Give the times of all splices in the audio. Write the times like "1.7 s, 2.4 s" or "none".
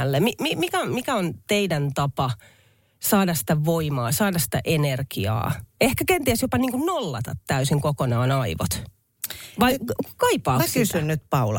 none